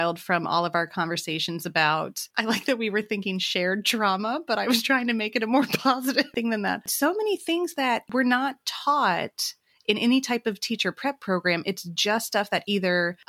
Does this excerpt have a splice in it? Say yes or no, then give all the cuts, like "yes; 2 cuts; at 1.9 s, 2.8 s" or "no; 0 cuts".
no; 0 cuts